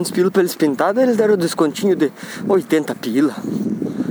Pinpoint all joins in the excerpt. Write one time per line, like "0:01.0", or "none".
none